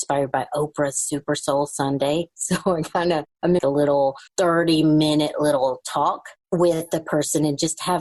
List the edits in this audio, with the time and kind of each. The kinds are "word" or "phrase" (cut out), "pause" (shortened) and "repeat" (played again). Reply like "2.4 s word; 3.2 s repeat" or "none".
3.6 s phrase; 4.3 s pause

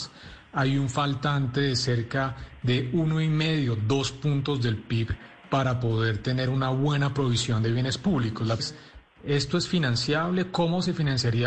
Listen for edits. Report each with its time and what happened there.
8.6 s word

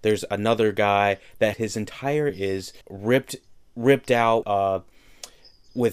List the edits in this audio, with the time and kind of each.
1.5 s word; 2.3 s word; 2.8 s pause; 4.4 s word

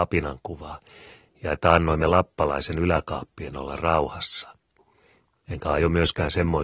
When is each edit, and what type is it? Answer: none

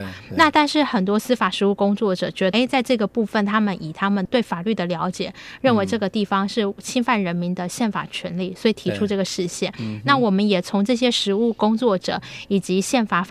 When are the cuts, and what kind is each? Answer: 2.5 s word

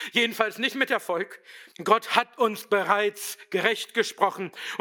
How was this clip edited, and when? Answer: 1.7 s pause

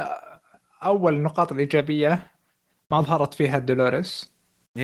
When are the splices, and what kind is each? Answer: none

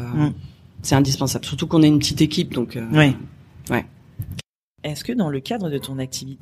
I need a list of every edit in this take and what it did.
none

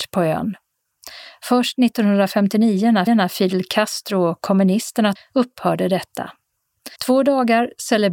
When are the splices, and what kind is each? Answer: 3.1 s repeat; 5.2 s phrase; 7.0 s pause

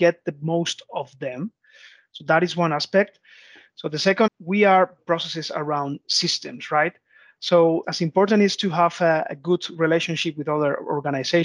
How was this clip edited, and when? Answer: 4.3 s phrase; 5.0 s phrase; 7.8 s phrase

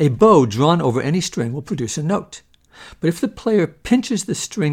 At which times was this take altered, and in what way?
none

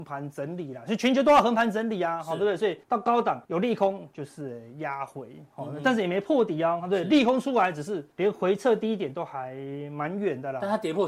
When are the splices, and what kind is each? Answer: 2.8 s pause; 3.4 s pause; 8.1 s pause

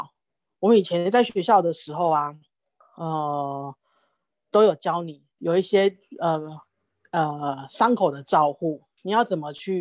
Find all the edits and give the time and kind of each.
5.4 s word

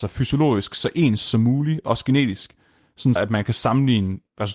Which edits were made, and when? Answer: 3.2 s word

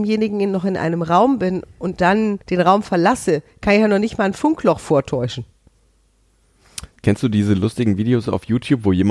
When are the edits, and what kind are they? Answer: 2.4 s pause; 7.0 s pause

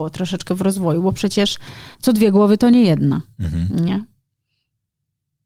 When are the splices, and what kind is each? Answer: 1.9 s pause

